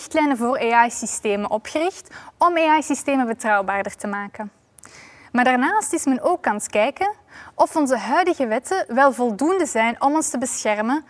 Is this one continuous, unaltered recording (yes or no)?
yes